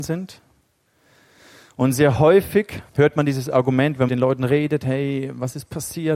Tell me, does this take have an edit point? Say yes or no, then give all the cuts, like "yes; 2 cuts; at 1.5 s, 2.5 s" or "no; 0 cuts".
yes; 2 cuts; at 2.9 s, 4.1 s